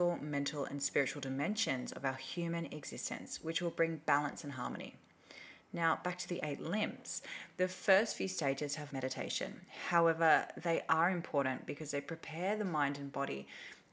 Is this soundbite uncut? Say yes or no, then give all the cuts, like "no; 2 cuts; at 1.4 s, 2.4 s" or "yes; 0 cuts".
no; 1 cut; at 8.9 s